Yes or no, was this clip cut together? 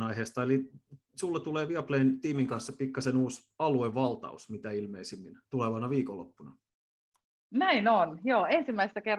no